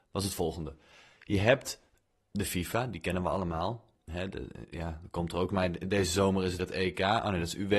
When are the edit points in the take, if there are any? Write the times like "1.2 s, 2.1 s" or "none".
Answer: 5.5 s, 6.6 s